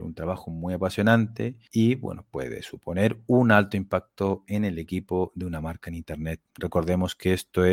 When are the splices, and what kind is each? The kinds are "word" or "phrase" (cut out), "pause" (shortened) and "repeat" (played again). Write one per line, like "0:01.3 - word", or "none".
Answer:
0:06.5 - pause